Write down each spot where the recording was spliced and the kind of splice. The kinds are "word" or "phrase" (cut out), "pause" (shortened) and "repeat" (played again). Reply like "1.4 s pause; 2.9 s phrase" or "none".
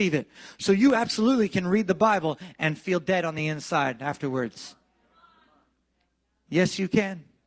none